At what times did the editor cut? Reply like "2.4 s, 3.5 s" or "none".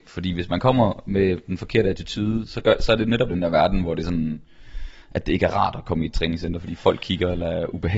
3.3 s